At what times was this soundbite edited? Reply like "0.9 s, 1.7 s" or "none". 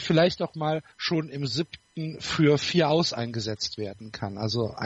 0.9 s

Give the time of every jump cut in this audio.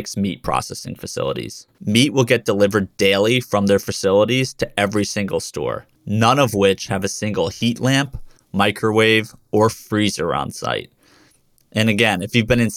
1.7 s, 6.0 s

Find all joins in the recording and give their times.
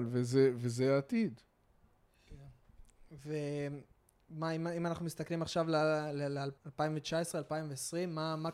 6.6 s

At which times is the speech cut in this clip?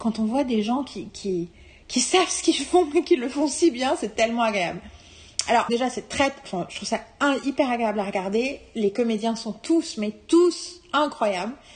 1.1 s, 5.7 s

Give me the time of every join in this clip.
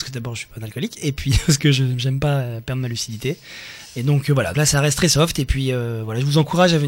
4.5 s

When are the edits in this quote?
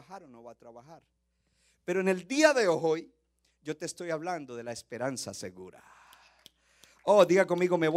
none

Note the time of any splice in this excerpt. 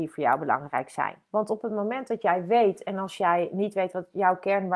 1.2 s

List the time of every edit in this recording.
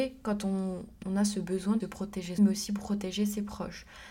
1.0 s, 1.8 s, 2.4 s

